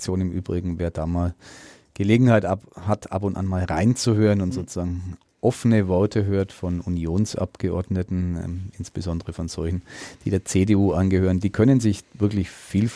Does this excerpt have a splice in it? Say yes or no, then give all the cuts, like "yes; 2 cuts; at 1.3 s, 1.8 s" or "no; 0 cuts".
no; 0 cuts